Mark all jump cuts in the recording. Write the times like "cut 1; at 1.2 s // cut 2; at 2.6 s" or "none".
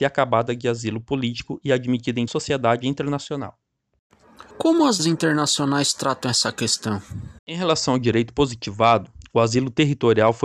cut 1; at 2.3 s // cut 2; at 4.5 s // cut 3; at 5.0 s // cut 4; at 7.4 s